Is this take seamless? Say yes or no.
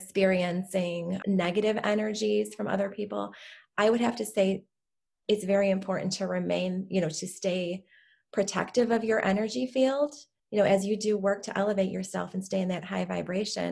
no